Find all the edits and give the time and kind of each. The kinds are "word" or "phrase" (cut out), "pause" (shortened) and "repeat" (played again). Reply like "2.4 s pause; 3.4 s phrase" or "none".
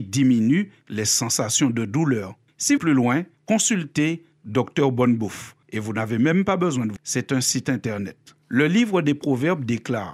2.8 s phrase; 3.4 s word; 5.6 s pause; 7.0 s word; 8.4 s pause